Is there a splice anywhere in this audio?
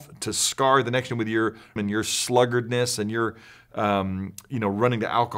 yes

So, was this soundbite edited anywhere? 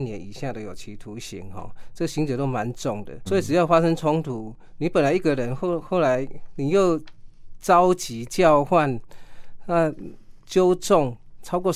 yes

